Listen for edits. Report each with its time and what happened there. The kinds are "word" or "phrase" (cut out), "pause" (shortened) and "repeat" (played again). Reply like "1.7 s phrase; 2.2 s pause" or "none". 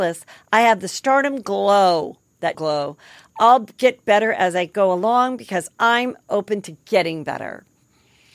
2.5 s word